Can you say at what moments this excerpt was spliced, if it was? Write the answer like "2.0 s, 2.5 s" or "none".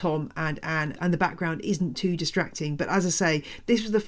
none

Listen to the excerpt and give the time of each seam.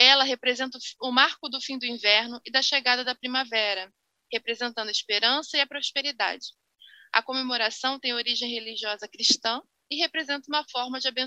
none

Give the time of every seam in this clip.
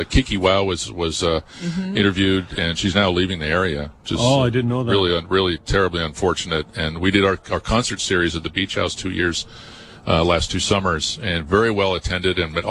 4.0 s

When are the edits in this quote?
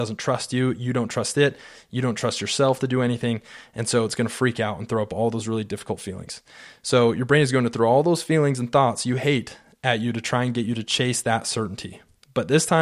none

